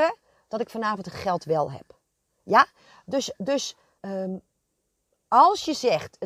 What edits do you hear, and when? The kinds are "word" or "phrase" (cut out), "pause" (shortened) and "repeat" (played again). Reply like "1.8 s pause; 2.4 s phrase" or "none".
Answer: 4.0 s word